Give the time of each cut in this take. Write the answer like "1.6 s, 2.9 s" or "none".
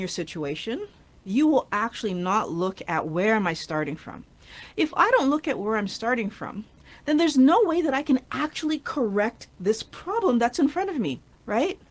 none